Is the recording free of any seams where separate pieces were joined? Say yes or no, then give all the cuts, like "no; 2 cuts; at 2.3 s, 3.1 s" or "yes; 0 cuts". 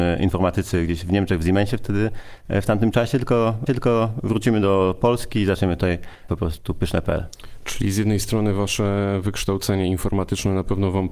no; 2 cuts; at 3.7 s, 6.3 s